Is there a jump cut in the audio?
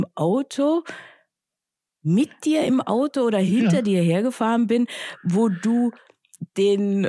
no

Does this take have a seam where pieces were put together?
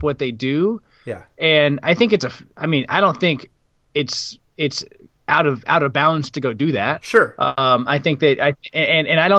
no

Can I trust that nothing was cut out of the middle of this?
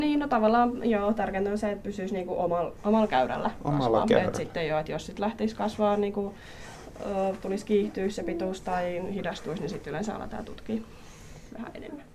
yes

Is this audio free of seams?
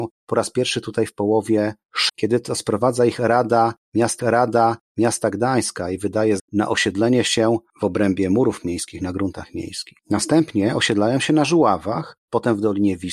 no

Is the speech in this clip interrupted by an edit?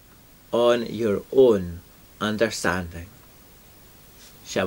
no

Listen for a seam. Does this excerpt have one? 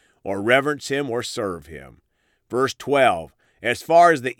no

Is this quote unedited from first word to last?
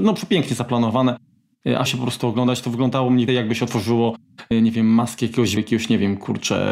no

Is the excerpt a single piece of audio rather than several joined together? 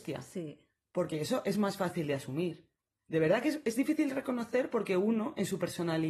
yes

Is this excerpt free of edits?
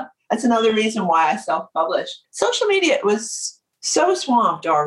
yes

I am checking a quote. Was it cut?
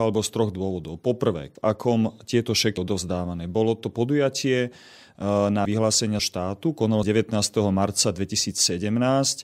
yes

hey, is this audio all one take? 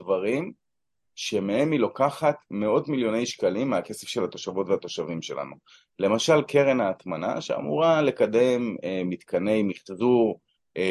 yes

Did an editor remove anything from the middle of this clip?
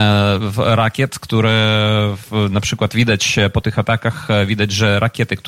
no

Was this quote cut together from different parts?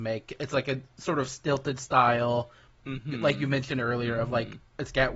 no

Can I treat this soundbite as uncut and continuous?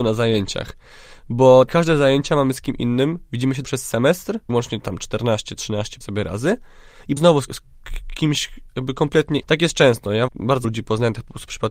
no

